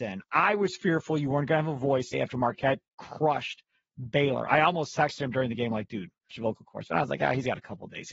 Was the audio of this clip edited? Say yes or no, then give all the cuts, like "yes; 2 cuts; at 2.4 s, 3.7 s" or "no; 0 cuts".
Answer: yes; 2 cuts; at 2.1 s, 6.3 s